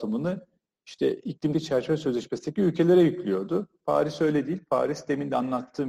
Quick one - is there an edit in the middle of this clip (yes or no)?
yes